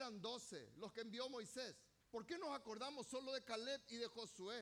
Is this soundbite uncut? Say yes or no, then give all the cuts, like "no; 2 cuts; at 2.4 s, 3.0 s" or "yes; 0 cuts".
no; 1 cut; at 2.0 s